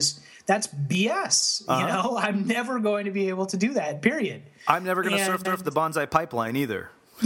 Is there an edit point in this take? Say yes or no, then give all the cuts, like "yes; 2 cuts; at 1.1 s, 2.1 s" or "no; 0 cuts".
yes; 1 cut; at 5.4 s